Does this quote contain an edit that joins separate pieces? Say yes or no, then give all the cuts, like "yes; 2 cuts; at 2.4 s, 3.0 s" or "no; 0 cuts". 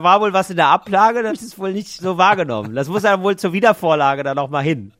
yes; 2 cuts; at 1.3 s, 2.0 s